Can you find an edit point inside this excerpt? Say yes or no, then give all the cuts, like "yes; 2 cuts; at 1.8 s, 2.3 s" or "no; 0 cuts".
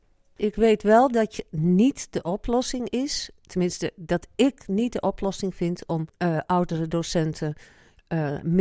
no; 0 cuts